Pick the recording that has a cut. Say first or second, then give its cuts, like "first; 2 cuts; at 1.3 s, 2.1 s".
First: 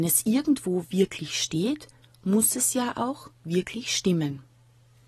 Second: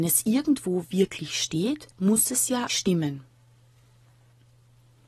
second; 2 cuts; at 1.9 s, 2.7 s